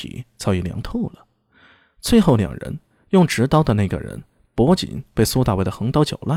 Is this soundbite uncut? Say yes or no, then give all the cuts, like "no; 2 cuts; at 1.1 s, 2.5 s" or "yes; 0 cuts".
yes; 0 cuts